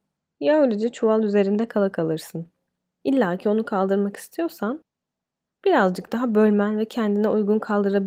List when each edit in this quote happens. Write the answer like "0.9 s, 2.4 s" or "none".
none